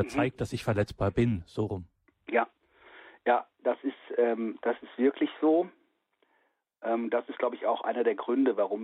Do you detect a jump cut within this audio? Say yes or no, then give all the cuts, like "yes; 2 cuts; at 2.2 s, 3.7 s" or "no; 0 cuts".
no; 0 cuts